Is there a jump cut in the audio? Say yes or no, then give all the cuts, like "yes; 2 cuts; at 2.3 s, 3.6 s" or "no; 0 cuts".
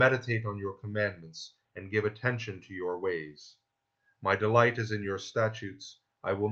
no; 0 cuts